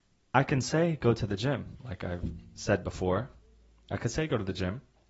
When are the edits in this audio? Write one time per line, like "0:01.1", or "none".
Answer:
none